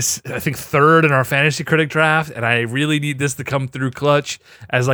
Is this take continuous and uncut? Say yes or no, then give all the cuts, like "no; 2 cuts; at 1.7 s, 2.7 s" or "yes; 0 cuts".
yes; 0 cuts